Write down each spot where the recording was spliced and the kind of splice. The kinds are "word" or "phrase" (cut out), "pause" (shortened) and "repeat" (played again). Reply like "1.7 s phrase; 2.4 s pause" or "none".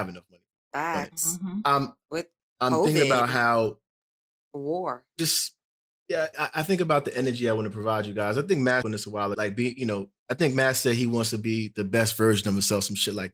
6.3 s word; 8.8 s word; 9.3 s phrase; 10.2 s pause